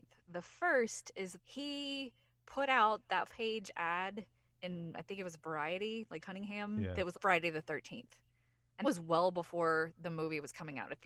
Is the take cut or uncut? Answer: cut